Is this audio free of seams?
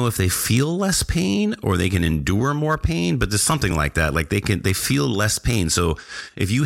yes; 0 cuts

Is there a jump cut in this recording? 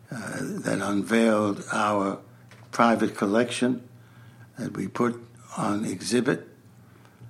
no; 0 cuts

